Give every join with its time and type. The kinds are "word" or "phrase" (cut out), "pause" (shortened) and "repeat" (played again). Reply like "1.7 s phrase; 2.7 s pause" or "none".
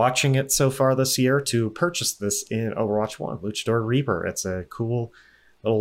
none